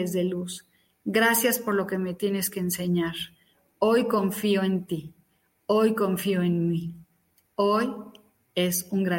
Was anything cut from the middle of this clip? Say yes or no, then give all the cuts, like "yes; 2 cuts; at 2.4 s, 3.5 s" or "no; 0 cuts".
no; 0 cuts